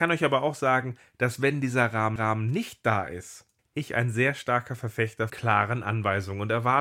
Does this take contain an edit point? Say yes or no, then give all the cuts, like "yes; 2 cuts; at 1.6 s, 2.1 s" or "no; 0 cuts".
yes; 3 cuts; at 2.2 s, 3.6 s, 5.3 s